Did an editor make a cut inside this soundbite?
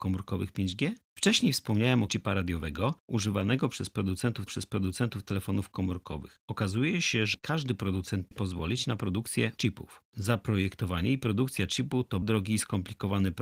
yes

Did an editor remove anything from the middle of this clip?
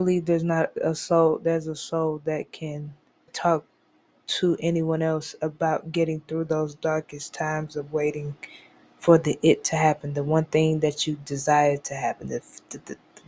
yes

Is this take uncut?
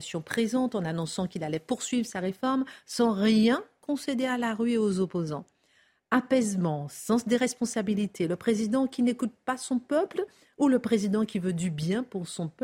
yes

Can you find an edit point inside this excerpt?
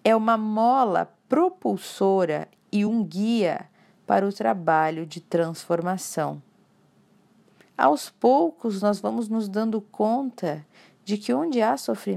no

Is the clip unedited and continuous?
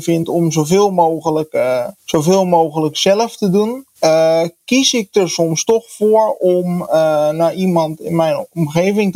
no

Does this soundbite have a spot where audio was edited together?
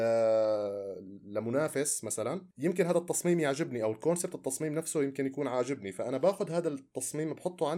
yes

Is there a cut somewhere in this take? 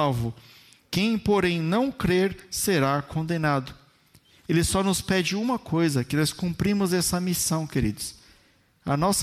no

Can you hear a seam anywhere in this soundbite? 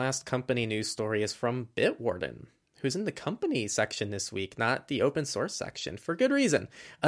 no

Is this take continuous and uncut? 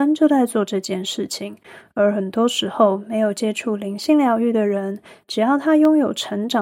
yes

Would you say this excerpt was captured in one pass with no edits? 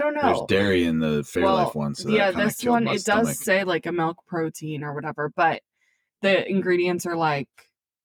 yes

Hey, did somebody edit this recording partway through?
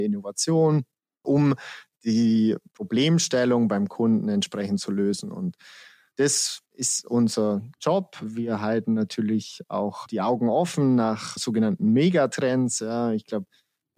yes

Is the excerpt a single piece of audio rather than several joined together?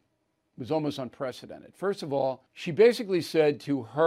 no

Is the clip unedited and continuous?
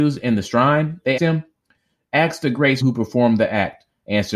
no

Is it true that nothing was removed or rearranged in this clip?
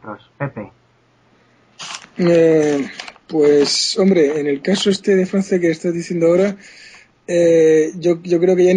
yes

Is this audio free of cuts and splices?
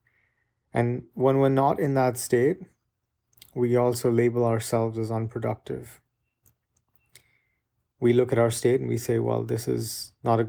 yes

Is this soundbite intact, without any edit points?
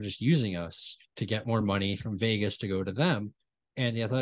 yes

